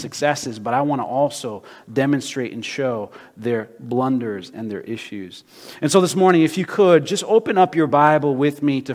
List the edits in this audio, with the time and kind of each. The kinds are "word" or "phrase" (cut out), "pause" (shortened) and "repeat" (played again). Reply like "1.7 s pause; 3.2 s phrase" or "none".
none